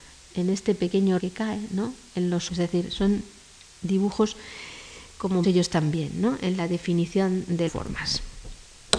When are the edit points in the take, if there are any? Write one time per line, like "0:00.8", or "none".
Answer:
0:01.2
0:02.5
0:05.4
0:07.7